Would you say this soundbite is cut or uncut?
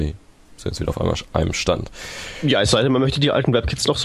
uncut